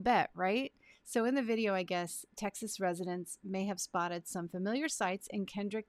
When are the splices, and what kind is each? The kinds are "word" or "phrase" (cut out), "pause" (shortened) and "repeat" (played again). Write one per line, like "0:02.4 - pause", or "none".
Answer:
none